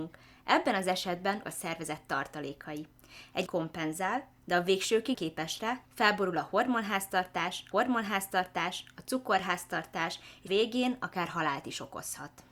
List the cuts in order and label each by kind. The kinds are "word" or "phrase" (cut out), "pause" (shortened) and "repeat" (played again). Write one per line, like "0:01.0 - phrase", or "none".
0:01.4 - phrase
0:03.5 - word
0:05.1 - word
0:05.8 - pause
0:07.7 - repeat
0:10.5 - word